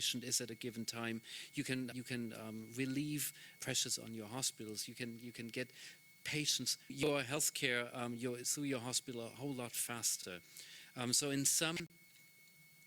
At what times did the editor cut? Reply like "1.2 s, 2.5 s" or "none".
1.9 s, 3.6 s, 6.9 s

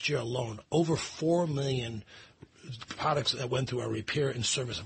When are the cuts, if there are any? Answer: 2.8 s

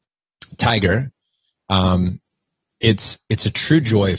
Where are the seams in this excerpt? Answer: none

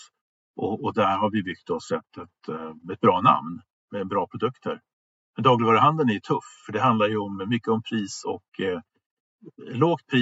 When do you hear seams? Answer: none

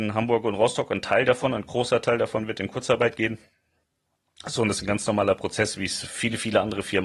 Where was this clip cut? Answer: none

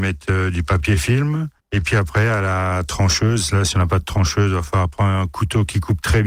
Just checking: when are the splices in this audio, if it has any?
1.6 s

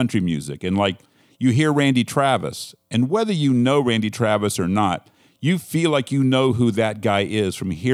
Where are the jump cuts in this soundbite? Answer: none

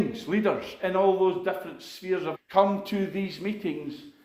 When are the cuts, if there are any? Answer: 2.3 s

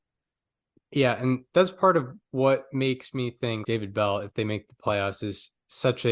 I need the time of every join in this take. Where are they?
3.6 s

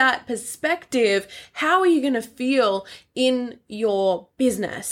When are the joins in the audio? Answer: none

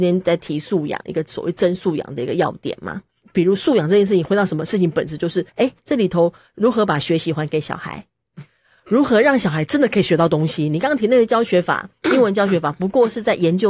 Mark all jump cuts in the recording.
5.5 s

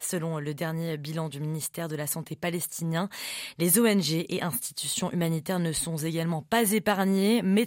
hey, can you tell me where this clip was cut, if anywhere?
none

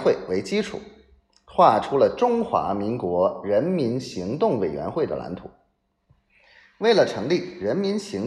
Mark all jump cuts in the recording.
none

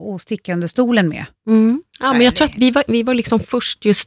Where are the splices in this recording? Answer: 2.5 s, 2.9 s

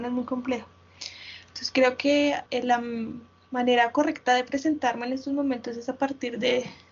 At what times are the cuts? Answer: 2.5 s

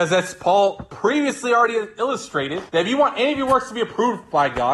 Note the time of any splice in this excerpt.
2.7 s

